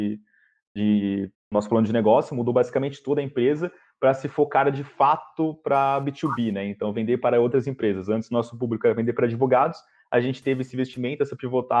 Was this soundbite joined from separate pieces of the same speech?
yes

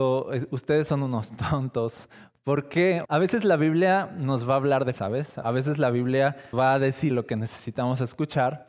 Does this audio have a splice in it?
yes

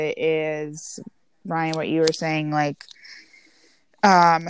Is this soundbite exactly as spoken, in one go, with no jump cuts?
yes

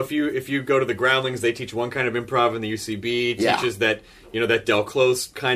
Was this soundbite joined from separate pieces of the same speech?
no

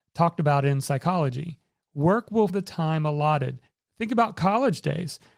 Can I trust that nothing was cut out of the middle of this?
no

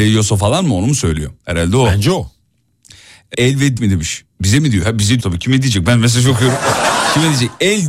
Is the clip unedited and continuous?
no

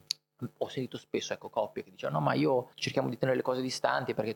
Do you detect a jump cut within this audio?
yes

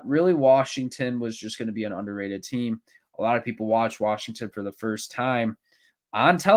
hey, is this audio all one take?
yes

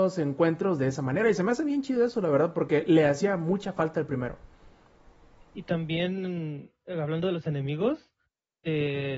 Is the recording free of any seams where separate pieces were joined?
yes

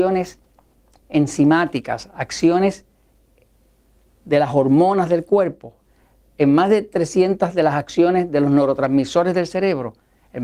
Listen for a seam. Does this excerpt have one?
no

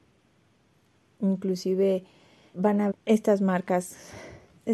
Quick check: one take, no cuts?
no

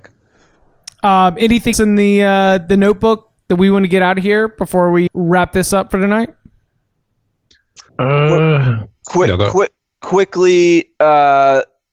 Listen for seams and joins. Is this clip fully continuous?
no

